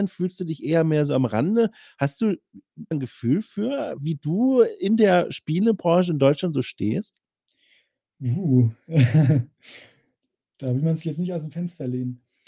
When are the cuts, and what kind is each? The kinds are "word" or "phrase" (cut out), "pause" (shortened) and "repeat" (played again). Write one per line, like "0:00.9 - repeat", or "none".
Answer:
0:02.9 - phrase
0:04.0 - word